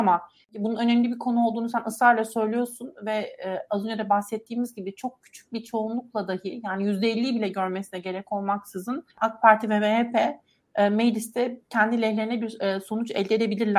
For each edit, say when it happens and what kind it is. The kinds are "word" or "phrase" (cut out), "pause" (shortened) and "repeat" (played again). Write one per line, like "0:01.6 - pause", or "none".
0:09.1 - pause
0:11.6 - pause